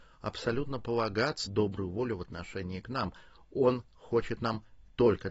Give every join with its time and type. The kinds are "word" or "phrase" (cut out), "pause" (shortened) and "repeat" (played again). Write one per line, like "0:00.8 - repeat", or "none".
0:01.5 - phrase